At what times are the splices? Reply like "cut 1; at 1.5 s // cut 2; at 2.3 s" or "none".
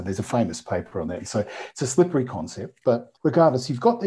cut 1; at 3.2 s

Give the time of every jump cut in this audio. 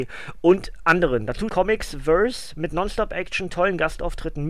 cut 1; at 1.5 s

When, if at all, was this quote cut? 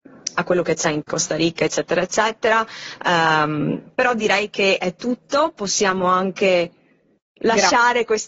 none

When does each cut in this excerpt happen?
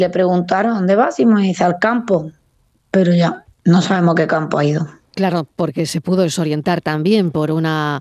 cut 1; at 3.5 s

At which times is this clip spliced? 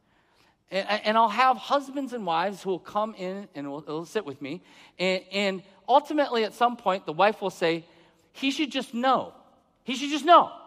none

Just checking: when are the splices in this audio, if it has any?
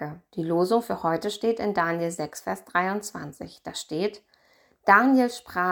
none

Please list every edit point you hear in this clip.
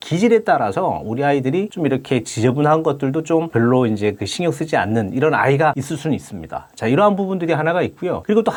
none

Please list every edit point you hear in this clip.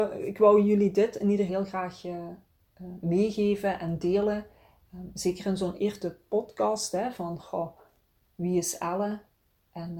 cut 1; at 1.5 s // cut 2; at 5.8 s

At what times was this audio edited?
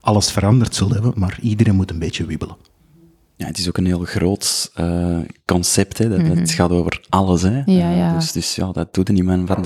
none

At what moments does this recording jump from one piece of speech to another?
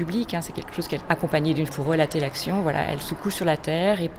cut 1; at 1.0 s // cut 2; at 1.7 s

